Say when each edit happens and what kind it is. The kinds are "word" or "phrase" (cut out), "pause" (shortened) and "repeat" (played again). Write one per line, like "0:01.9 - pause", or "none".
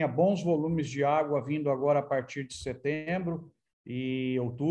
none